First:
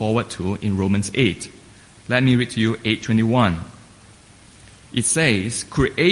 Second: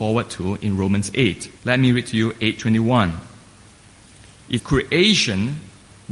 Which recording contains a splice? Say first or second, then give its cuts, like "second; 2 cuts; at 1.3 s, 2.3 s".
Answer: second; 2 cuts; at 1.6 s, 4.6 s